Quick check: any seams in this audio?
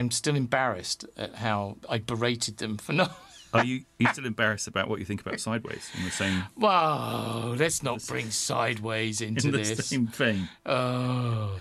yes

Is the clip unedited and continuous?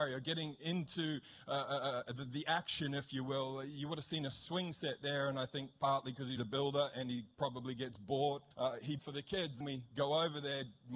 no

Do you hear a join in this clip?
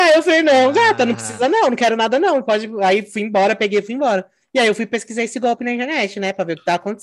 no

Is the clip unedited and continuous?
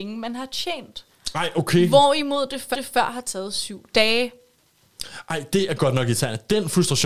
no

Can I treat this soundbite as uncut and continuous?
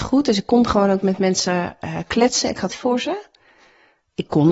no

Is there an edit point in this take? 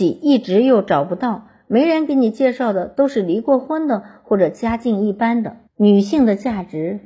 yes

